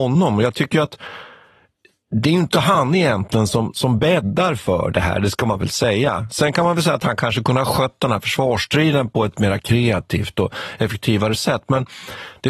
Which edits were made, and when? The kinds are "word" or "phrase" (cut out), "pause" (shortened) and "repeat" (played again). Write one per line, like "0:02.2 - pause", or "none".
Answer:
none

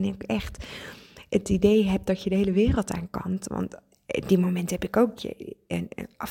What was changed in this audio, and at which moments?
0:05.2 - word

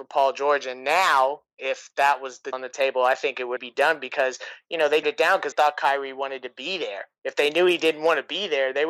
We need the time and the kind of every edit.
0:02.5 - word
0:03.6 - word
0:05.0 - word
0:05.5 - word

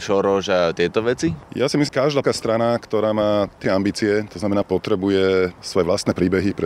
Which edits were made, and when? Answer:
0:01.5 - pause
0:01.9 - word
0:02.2 - word
0:03.6 - word
0:04.6 - word

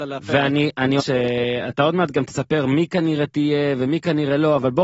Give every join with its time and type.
0:01.0 - phrase

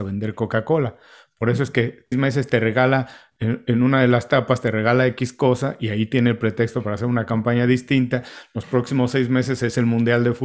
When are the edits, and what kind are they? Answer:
0:02.1 - word

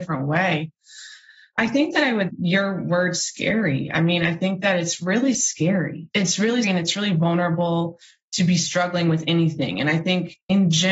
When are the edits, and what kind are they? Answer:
0:02.3 - phrase
0:06.6 - word

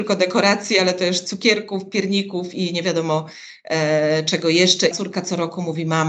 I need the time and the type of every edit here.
0:04.9 - word

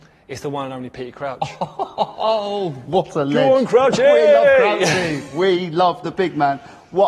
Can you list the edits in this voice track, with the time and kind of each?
none

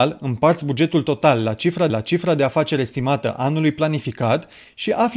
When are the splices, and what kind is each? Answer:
0:01.9 - repeat

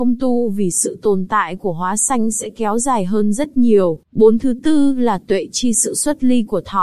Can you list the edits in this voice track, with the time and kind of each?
0:04.0 - pause

